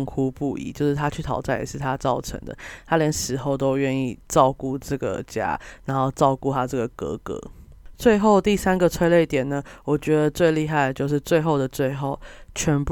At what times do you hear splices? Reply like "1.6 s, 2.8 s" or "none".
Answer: 4.2 s